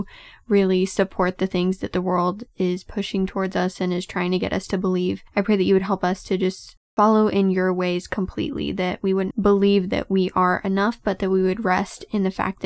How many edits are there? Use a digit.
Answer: 0